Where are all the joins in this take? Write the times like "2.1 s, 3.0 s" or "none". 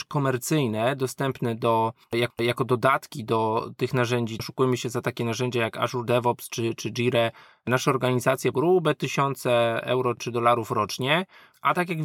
2.3 s, 4.4 s, 8.5 s

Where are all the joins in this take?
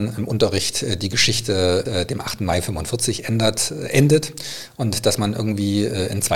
1.9 s

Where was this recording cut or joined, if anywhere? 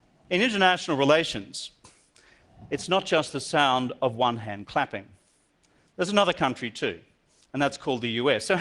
none

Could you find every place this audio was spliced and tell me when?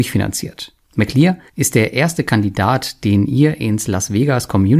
none

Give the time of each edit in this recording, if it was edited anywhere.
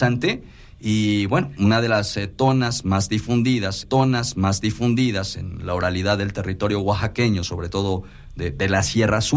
3.8 s

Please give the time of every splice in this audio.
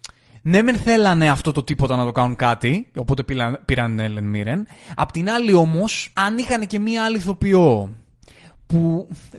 6.1 s

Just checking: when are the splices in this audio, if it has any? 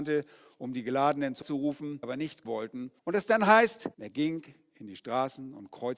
1.4 s, 2.0 s, 2.4 s, 3.0 s, 3.9 s

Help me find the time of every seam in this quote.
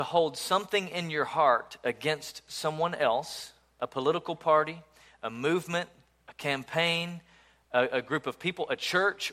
none

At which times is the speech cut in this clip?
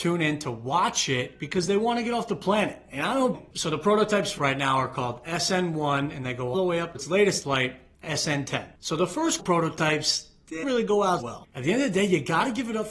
3.3 s, 4.4 s, 6.5 s, 6.9 s, 7.4 s, 9.4 s, 10.6 s, 11.2 s

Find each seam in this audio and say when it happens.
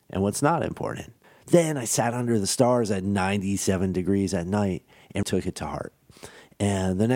1.2 s, 5.2 s

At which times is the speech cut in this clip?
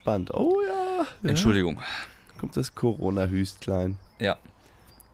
none

